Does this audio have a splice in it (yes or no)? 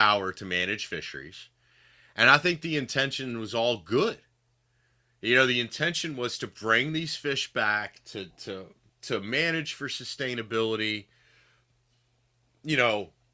no